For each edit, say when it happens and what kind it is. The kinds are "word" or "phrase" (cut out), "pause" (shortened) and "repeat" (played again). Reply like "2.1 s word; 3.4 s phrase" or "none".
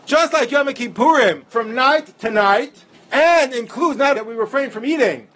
1.5 s word; 2.9 s pause; 4.1 s word